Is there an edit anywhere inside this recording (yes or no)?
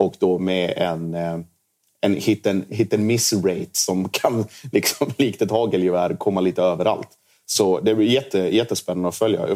no